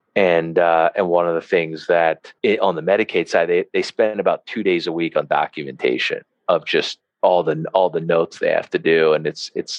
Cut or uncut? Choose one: cut